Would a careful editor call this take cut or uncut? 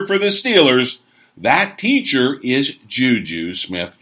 uncut